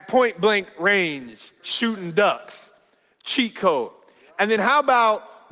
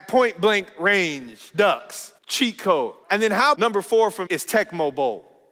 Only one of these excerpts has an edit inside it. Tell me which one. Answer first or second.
second